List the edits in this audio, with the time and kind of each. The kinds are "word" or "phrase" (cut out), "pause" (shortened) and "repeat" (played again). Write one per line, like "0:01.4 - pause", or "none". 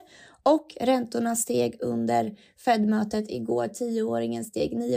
none

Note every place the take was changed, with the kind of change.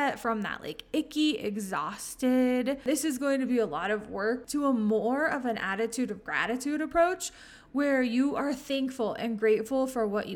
0:04.4 - word

